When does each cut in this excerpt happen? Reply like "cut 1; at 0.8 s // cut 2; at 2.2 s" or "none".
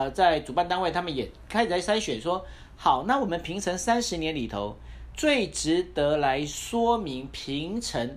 none